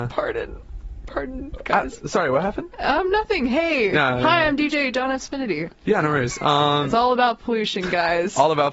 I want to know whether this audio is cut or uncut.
uncut